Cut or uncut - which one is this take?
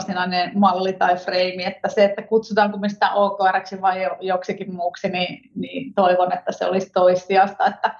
uncut